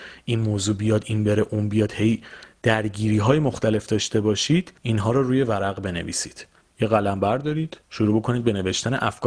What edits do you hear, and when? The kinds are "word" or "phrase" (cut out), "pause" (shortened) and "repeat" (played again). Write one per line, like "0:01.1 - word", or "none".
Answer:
0:04.8 - pause
0:06.6 - pause
0:07.8 - pause

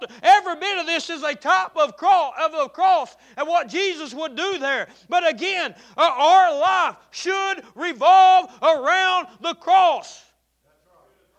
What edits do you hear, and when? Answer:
none

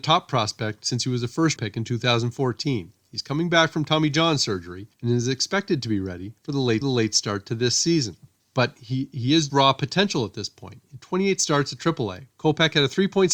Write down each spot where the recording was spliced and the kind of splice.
0:01.6 - word
0:04.9 - pause
0:06.4 - pause
0:06.8 - repeat
0:08.4 - pause
0:09.5 - word
0:12.3 - pause

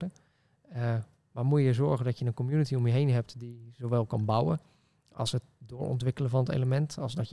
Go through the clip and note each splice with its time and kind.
none

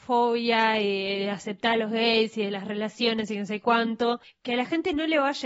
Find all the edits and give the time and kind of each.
0:04.2 - pause

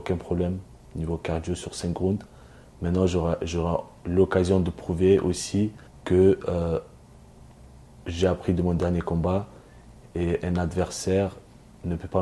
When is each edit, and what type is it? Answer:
0:05.9 - pause

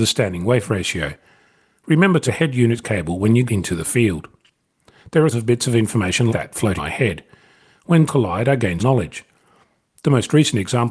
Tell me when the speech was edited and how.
0:02.3 - word
0:02.8 - word
0:03.5 - word
0:05.3 - word
0:06.3 - word
0:06.8 - word
0:08.1 - word
0:08.8 - word

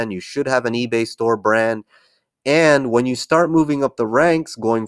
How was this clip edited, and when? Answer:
none

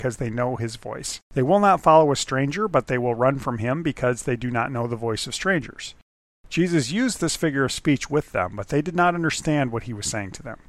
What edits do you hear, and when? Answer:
0:01.2 - pause

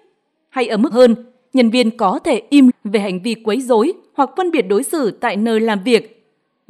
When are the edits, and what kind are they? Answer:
0:00.9 - phrase
0:02.7 - word

